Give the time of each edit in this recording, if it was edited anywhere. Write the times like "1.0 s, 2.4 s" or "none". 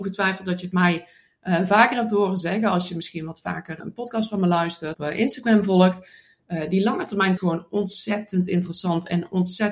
3.8 s, 4.9 s, 7.4 s